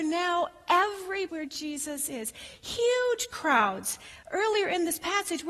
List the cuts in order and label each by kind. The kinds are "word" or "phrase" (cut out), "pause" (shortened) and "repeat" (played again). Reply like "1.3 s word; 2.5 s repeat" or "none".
1.3 s word